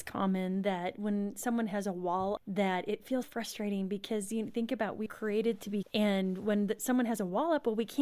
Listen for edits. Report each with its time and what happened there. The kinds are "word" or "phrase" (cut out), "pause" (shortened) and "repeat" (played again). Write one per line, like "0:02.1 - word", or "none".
0:02.4 - word
0:03.2 - word
0:05.1 - word
0:05.8 - word

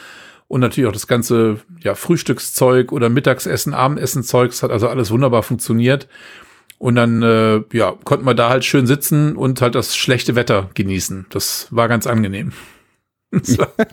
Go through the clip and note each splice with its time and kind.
none

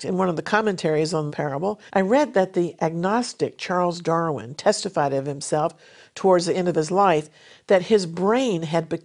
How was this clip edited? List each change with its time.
0:01.3 - word
0:01.9 - pause

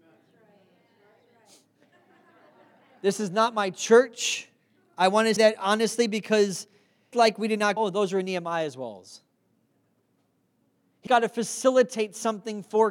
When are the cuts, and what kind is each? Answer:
0:05.4 - word
0:07.1 - word
0:07.8 - word
0:11.1 - word

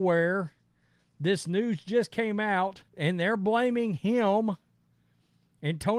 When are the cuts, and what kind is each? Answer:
0:02.9 - pause

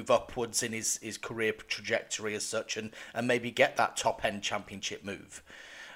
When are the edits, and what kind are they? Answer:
none

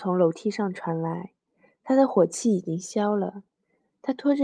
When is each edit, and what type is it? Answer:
none

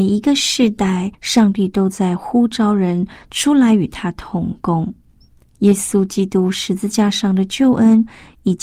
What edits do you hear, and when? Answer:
0:01.1 - pause

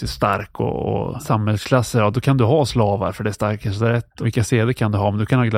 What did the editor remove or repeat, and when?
none

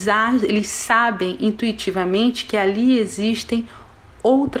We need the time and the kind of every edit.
none

